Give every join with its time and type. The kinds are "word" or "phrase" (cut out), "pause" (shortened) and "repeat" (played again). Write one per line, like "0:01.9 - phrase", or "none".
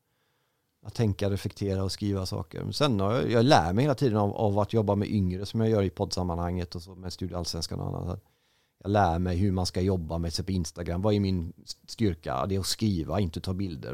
none